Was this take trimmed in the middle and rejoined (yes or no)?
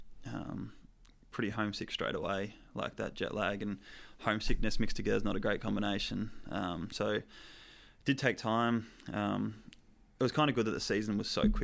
no